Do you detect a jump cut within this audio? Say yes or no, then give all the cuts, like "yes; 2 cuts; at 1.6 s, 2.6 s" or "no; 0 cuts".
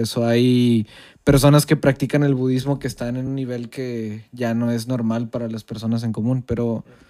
no; 0 cuts